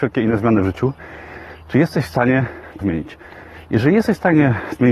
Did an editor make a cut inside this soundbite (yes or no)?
yes